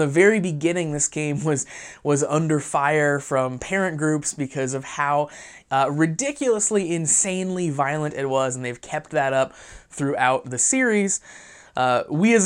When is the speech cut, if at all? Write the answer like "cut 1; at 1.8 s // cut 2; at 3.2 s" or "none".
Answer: none